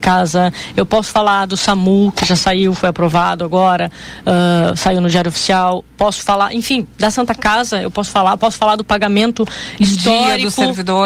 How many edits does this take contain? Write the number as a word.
zero